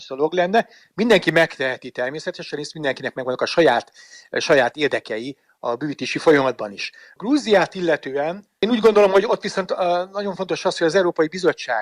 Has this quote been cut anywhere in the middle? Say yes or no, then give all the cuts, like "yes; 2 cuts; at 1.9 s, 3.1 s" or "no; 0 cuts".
no; 0 cuts